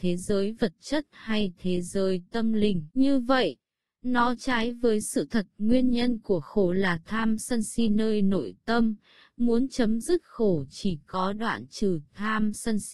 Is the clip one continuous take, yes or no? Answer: no